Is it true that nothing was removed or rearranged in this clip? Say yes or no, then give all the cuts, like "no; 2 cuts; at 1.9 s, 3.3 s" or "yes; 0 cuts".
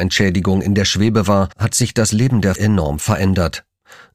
no; 2 cuts; at 1.5 s, 2.6 s